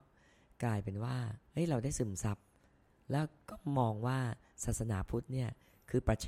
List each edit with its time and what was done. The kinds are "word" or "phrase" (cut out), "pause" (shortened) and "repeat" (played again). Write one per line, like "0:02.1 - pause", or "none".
0:01.5 - pause